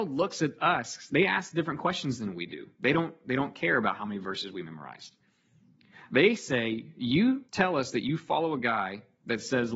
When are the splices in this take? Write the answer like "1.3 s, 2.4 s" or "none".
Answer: 7.5 s